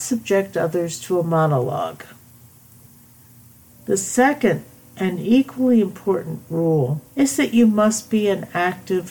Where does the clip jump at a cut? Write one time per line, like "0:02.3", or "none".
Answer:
0:07.1